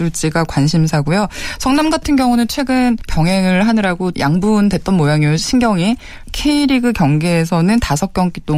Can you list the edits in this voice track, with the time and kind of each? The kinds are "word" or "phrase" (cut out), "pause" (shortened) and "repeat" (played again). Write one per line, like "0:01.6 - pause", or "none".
0:03.1 - word
0:04.1 - word